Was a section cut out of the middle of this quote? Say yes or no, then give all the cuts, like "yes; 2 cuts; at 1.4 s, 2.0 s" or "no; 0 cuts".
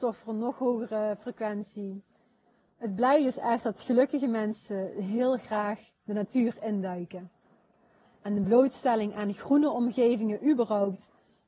no; 0 cuts